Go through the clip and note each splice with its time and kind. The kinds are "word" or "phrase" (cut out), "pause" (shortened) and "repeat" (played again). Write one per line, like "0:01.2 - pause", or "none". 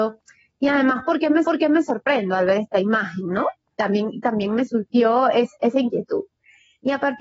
0:01.4 - repeat